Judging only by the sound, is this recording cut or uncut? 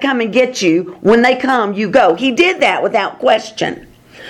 uncut